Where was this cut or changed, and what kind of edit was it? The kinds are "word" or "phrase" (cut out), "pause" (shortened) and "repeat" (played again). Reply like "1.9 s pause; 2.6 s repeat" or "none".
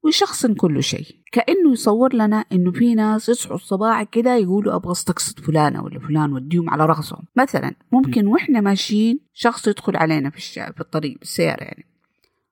1.2 s pause; 7.3 s pause; 9.3 s pause